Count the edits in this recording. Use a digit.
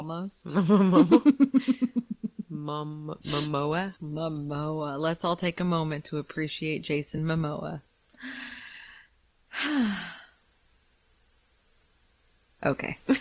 0